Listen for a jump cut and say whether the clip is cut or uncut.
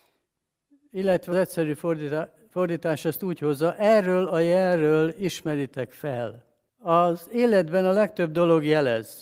cut